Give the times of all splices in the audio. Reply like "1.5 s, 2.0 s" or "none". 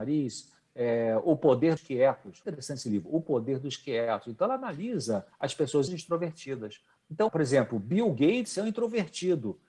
1.8 s, 2.4 s, 5.3 s, 5.9 s, 7.3 s

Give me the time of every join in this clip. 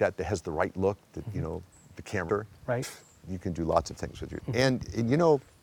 2.3 s, 4.4 s

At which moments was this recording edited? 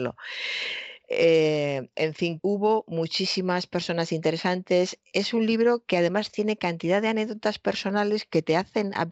2.4 s

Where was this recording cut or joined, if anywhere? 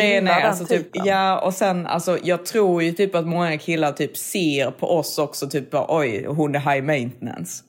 none

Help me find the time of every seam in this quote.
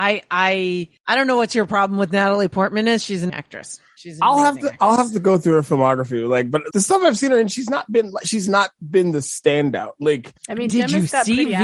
1.0 s, 3.3 s, 6.7 s, 10.4 s

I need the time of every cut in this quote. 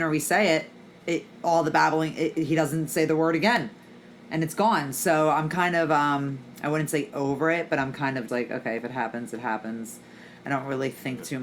8.3 s

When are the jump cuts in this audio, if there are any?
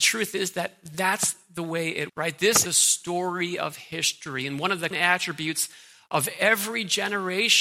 2.1 s, 2.7 s, 4.9 s

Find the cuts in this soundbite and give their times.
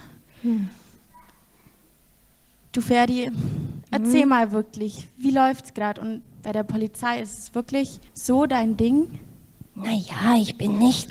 8.1 s, 9.7 s

